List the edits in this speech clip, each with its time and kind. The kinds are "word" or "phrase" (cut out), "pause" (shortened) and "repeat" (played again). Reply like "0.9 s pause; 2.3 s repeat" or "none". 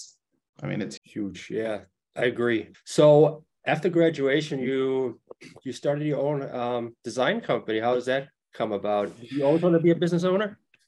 1.0 s word; 2.7 s word